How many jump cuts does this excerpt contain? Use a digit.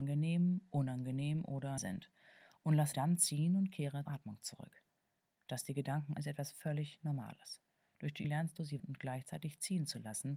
6